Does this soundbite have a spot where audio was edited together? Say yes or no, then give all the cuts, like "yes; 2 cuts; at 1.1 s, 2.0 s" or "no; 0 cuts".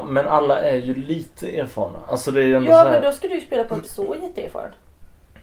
yes; 1 cut; at 3.8 s